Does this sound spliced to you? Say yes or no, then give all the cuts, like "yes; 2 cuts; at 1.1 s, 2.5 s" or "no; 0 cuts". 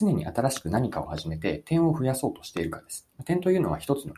yes; 1 cut; at 3.1 s